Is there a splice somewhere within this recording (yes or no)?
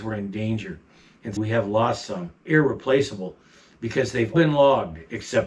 yes